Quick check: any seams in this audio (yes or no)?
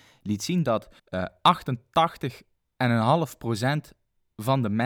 yes